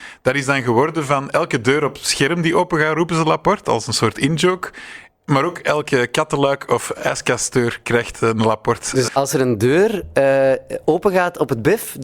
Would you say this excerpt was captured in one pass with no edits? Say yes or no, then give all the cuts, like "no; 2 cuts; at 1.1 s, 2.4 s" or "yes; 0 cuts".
no; 1 cut; at 9.1 s